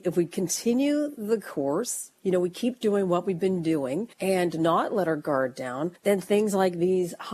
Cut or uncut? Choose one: cut